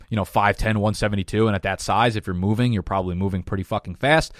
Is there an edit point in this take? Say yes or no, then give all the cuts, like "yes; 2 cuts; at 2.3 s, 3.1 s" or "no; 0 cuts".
no; 0 cuts